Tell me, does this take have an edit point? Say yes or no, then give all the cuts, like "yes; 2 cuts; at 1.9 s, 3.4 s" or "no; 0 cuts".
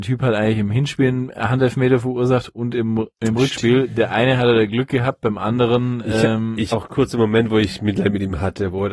yes; 2 cuts; at 3.1 s, 6.7 s